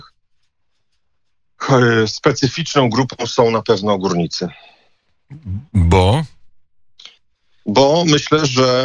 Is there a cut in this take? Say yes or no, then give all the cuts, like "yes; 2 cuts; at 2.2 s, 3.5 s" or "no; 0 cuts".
no; 0 cuts